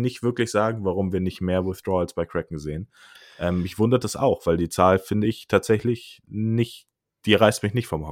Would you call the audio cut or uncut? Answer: uncut